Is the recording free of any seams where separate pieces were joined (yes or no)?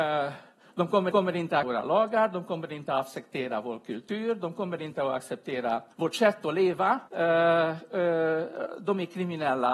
no